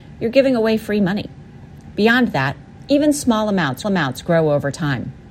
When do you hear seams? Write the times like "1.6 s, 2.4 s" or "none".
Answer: 3.8 s